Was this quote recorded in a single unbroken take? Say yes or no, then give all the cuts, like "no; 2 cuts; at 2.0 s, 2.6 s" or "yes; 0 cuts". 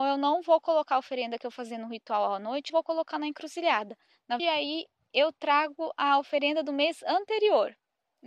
no; 2 cuts; at 2.7 s, 4.4 s